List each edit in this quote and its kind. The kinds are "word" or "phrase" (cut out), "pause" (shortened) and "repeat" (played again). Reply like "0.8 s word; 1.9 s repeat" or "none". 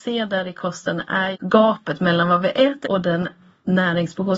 1.3 s word; 2.8 s word